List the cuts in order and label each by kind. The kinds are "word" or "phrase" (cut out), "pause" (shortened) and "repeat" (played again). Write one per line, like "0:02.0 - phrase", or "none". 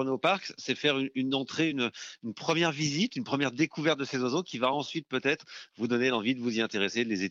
none